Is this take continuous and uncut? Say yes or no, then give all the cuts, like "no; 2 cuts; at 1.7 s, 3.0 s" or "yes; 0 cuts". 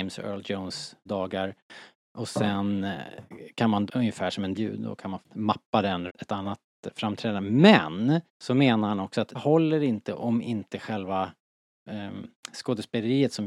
no; 7 cuts; at 1.1 s, 3.9 s, 4.6 s, 5.2 s, 6.1 s, 8.3 s, 9.3 s